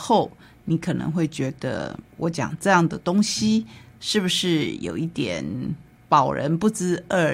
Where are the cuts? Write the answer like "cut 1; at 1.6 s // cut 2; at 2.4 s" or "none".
cut 1; at 2.1 s